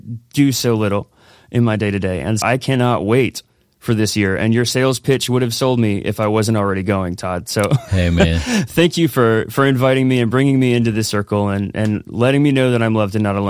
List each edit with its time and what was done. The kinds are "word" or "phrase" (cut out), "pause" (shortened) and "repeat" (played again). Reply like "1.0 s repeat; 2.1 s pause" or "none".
2.4 s word